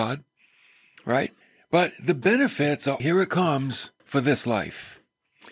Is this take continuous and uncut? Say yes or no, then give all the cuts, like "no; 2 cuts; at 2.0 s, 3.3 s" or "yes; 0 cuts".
no; 3 cuts; at 1.4 s, 3.0 s, 4.0 s